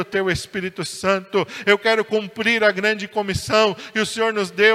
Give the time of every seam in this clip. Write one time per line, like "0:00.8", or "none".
none